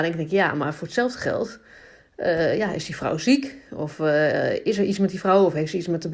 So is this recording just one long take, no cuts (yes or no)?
yes